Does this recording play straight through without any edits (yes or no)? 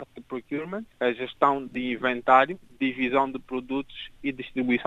no